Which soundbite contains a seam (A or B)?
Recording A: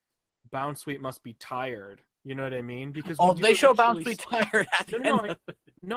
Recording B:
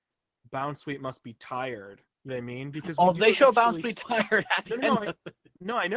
B